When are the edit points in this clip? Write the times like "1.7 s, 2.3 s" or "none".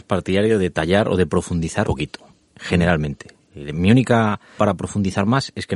1.8 s, 4.6 s